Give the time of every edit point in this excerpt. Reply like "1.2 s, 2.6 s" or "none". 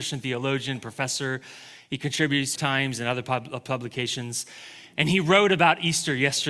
2.6 s